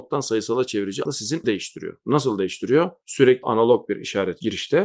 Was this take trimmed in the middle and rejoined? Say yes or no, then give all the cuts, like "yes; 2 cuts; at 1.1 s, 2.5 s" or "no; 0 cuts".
yes; 3 cuts; at 1.0 s, 1.4 s, 3.4 s